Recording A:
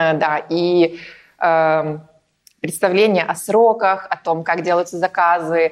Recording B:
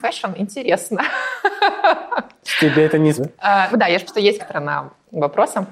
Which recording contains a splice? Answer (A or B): B